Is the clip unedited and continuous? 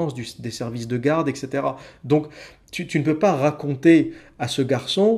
yes; 0 cuts

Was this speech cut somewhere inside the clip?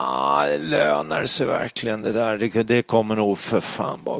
no; 0 cuts

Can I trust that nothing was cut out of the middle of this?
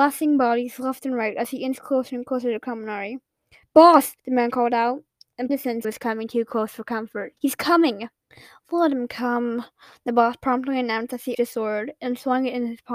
no; 6 cuts; at 4.2 s, 5.5 s, 5.8 s, 7.4 s, 8.3 s, 11.3 s

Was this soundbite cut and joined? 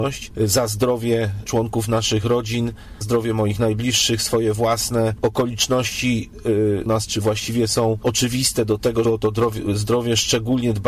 yes; 4 cuts; at 1.5 s, 3.0 s, 6.9 s, 9.0 s

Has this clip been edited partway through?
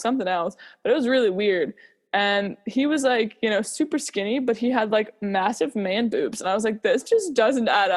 no; 0 cuts

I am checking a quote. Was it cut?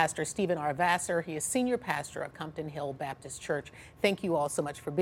no; 0 cuts

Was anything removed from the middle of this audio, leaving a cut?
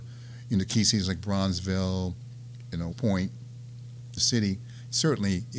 yes; 2 cuts; at 2.9 s, 4.2 s

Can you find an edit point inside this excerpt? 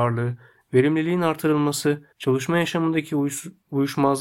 yes; 1 cut; at 2.1 s

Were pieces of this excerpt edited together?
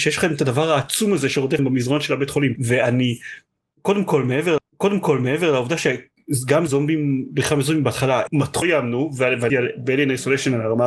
yes; 6 cuts; at 1.6 s, 4.6 s, 6.7 s, 8.3 s, 8.6 s, 9.5 s

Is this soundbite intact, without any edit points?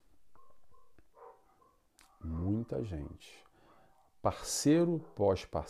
yes; 0 cuts

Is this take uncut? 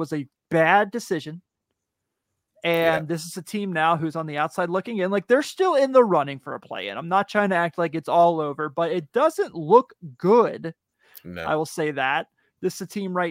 yes; 0 cuts

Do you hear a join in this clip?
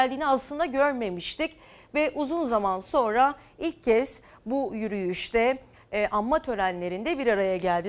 no; 0 cuts

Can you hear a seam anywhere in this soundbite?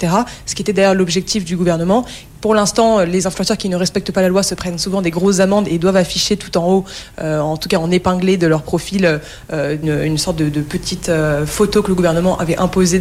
yes; 1 cut; at 9.8 s

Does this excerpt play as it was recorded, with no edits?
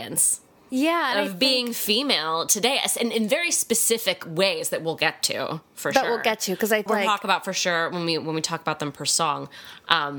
no; 1 cut; at 6.9 s

